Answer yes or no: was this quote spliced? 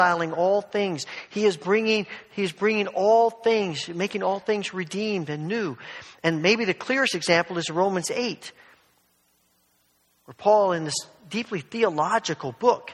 no